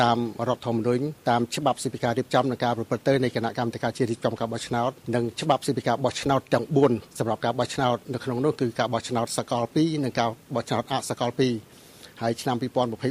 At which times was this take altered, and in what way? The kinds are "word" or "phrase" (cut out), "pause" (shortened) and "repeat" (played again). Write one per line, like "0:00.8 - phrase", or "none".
0:01.2 - pause
0:05.0 - pause
0:07.1 - pause

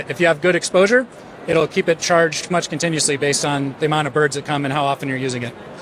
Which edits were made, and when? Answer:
0:02.5 - word

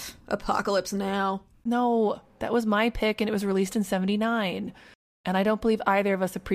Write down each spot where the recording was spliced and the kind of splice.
none

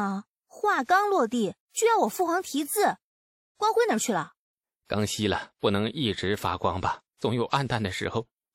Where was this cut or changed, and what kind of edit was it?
0:01.6 - pause

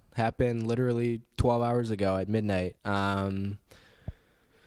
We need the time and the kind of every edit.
0:02.8 - pause

